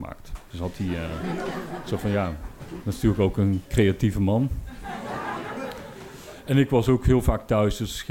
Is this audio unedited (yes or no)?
yes